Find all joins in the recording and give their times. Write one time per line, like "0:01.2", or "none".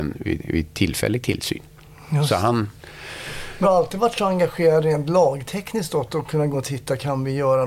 0:03.6
0:06.5